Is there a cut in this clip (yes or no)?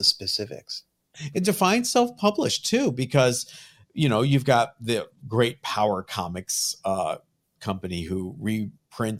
yes